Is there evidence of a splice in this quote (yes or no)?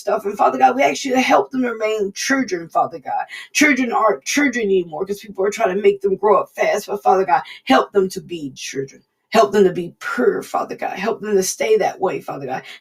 yes